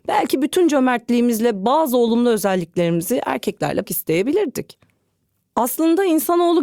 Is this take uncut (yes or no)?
no